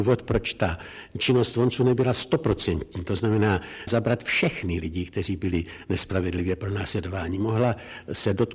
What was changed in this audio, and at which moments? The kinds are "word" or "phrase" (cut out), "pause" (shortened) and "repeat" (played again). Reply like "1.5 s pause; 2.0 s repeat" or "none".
3.9 s word